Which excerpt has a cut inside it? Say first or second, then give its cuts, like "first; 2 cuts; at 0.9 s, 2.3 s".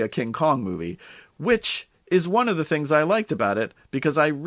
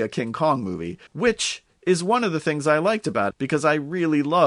second; 2 cuts; at 1.1 s, 3.3 s